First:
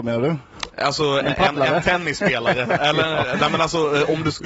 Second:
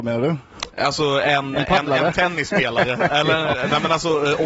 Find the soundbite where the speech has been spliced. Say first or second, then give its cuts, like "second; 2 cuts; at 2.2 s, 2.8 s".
first; 1 cut; at 1.2 s